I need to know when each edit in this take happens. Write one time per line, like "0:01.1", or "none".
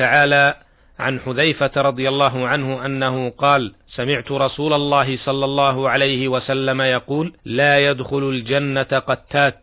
0:03.8
0:07.4